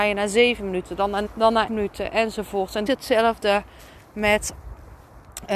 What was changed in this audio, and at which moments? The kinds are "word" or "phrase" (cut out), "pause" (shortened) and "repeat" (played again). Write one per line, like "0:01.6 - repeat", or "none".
0:01.3 - phrase
0:01.7 - word
0:02.9 - phrase